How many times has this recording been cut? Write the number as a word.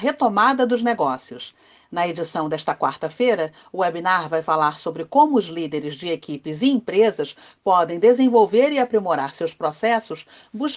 zero